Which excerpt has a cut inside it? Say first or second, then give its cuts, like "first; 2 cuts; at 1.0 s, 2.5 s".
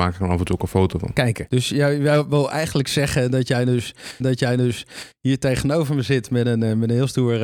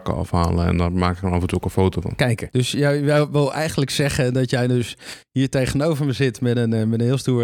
first; 1 cut; at 4.2 s